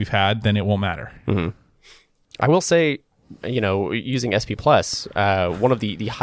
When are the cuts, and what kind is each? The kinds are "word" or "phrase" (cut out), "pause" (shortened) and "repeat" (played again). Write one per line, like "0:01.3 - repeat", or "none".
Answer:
none

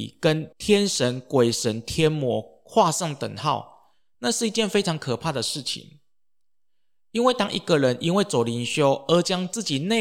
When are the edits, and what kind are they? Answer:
none

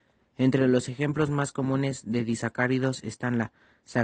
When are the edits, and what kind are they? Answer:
none

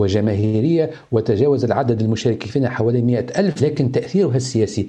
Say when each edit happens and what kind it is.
none

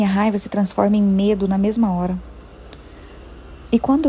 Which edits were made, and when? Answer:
none

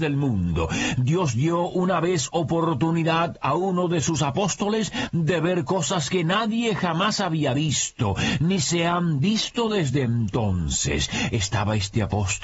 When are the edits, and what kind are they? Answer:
none

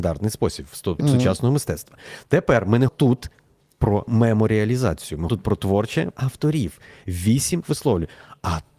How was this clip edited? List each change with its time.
0:01.0 - word
0:02.9 - word
0:04.1 - word
0:05.3 - word
0:06.1 - word
0:07.6 - word

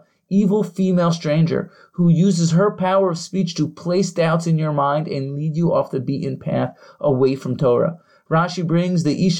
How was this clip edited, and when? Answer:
none

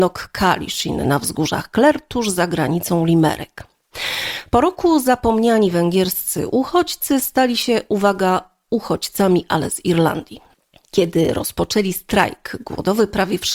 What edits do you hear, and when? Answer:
0:10.5 - pause

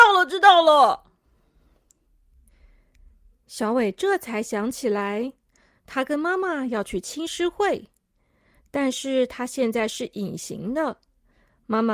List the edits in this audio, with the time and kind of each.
none

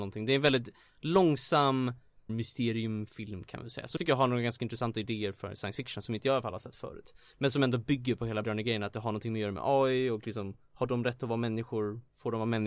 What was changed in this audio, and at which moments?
0:02.3 - word
0:04.0 - word
0:08.4 - word

